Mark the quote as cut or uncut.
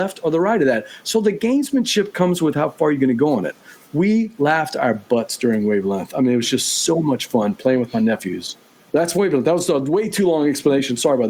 uncut